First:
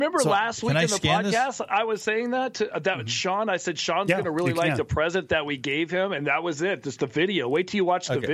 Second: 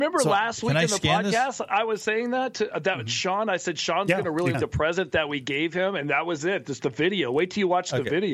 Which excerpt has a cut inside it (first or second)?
second